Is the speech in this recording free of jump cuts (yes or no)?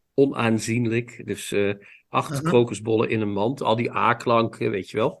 yes